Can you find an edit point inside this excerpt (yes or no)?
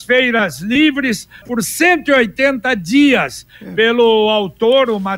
yes